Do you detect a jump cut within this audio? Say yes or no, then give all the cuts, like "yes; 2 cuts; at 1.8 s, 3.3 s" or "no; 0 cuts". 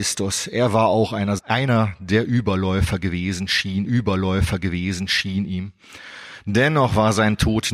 yes; 2 cuts; at 1.4 s, 3.9 s